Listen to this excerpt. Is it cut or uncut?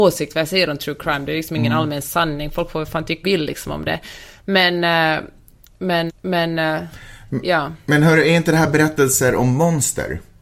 cut